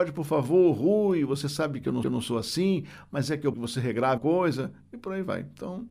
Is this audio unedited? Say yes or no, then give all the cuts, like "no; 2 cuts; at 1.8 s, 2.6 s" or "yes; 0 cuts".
no; 3 cuts; at 2.0 s, 3.5 s, 4.2 s